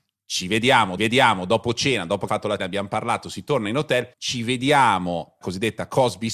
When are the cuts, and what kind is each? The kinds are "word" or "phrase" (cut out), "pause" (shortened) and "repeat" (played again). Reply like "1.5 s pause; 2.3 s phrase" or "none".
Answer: 1.0 s repeat; 2.3 s word; 2.6 s word; 4.1 s pause; 5.4 s word